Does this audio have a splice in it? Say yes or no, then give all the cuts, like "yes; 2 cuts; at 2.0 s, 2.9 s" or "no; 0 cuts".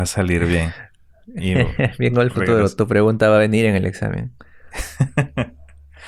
no; 0 cuts